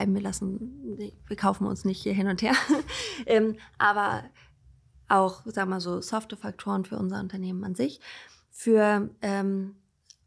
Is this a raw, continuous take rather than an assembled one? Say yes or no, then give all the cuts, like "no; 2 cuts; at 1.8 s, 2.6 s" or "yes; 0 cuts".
yes; 0 cuts